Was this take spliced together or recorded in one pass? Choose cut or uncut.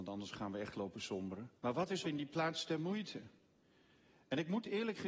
cut